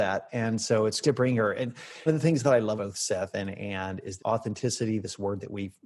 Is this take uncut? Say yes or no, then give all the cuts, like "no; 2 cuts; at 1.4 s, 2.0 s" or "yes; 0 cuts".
no; 4 cuts; at 1.0 s, 2.1 s, 2.8 s, 4.2 s